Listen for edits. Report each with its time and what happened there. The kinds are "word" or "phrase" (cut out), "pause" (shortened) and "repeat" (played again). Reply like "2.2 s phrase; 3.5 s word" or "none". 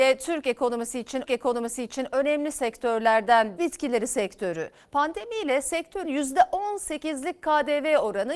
1.3 s repeat; 3.6 s phrase; 6.0 s word

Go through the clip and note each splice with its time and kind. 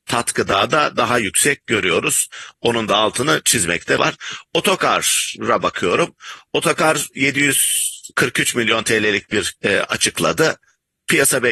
4.0 s word; 8.1 s pause; 9.6 s word

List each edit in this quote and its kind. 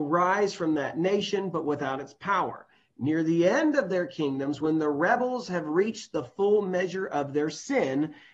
none

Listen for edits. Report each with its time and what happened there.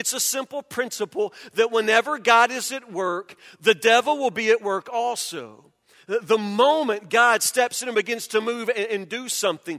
none

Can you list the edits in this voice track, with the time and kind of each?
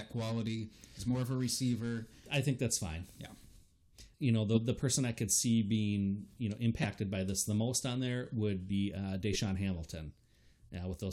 4.1 s pause

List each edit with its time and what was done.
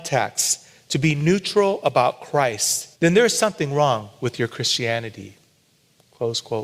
2.9 s pause

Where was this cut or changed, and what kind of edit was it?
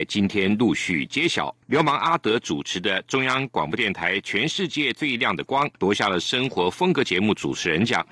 1.6 s pause; 5.8 s pause

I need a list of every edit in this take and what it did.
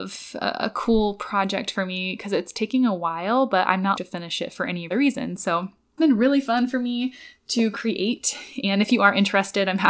4.0 s phrase; 4.9 s word; 6.0 s word

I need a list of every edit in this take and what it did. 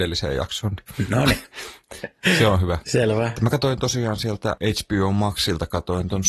none

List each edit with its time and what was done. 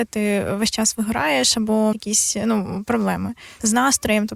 1.9 s word

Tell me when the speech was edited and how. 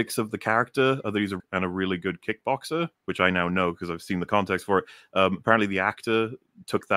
1.4 s phrase; 2.9 s pause

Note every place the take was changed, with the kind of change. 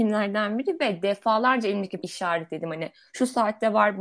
2.0 s word

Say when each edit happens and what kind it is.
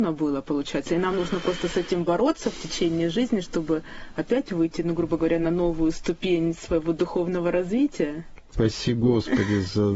none

